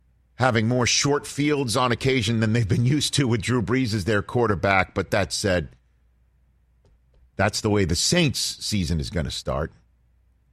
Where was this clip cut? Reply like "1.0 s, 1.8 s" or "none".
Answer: none

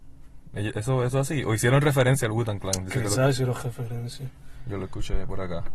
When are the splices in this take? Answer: none

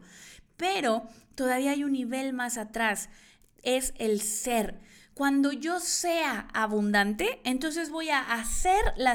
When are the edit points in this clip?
none

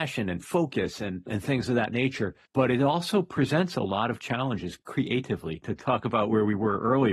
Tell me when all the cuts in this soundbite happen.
2.5 s, 4.8 s

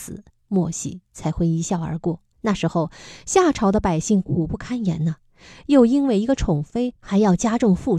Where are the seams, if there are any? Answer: 2.3 s

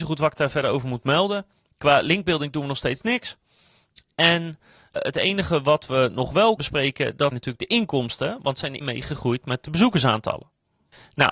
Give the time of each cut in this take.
5.0 s, 6.6 s, 7.3 s, 8.8 s

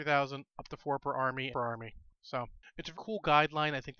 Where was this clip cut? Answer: 1.5 s, 2.9 s

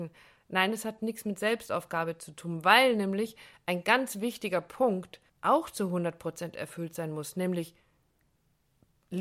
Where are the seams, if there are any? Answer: 5.3 s

